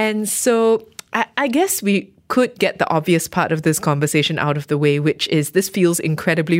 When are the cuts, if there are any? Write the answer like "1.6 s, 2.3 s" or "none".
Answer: none